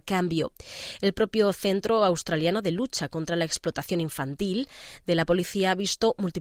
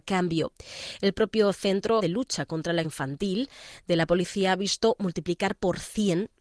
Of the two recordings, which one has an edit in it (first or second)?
second